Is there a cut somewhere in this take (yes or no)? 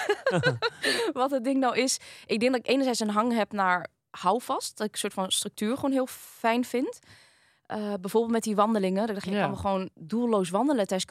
no